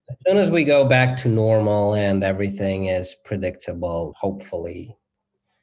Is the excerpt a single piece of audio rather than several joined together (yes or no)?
no